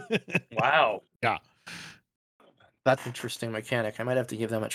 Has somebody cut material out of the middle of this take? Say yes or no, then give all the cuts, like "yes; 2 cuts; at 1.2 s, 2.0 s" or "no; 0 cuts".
yes; 1 cut; at 3.0 s